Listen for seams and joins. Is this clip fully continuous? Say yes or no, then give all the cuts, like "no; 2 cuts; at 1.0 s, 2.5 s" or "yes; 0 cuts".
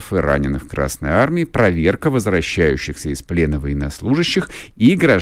yes; 0 cuts